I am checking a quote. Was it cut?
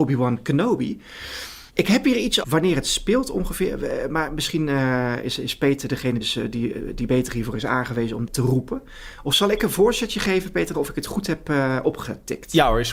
yes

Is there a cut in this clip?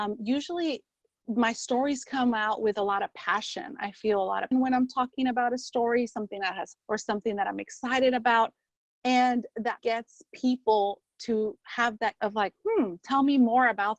yes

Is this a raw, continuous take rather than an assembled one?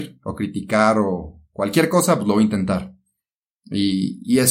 yes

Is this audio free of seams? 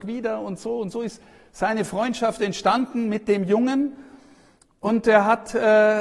yes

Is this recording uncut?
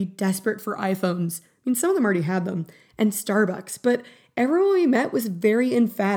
yes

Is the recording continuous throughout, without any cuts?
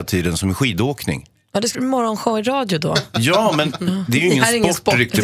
no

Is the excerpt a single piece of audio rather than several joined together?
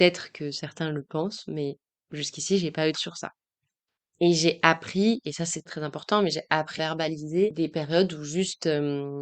no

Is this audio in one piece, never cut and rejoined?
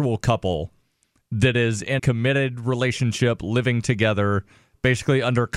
no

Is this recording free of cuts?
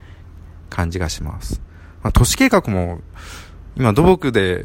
yes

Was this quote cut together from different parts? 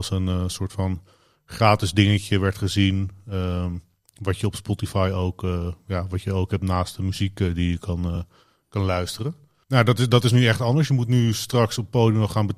no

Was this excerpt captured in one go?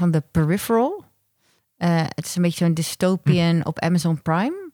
yes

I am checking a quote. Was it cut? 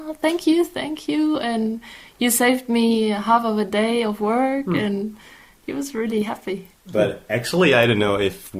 no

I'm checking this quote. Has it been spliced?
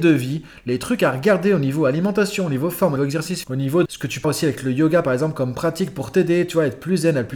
yes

